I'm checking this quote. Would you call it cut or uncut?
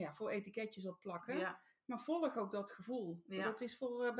uncut